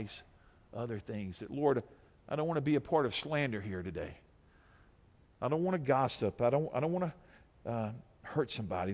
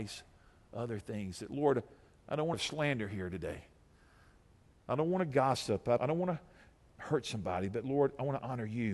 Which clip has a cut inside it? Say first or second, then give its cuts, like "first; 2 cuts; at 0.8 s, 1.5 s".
second; 3 cuts; at 2.5 s, 6.0 s, 6.9 s